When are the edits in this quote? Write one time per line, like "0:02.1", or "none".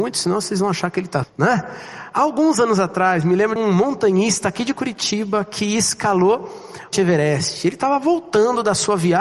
0:01.2
0:03.6
0:06.9